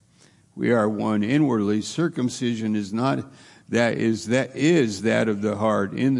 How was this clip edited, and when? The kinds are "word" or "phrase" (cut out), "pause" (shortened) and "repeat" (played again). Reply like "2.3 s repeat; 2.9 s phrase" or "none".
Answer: none